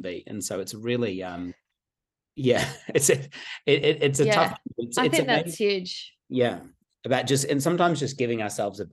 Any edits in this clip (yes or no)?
no